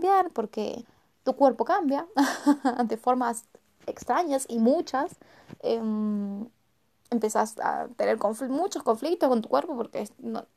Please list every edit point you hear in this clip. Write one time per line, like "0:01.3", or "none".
none